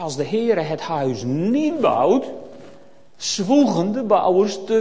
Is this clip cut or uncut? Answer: cut